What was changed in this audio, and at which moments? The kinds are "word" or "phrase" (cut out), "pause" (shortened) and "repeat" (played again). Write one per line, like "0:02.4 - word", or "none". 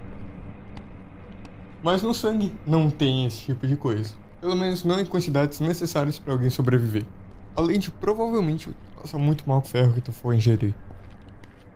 0:09.6 - phrase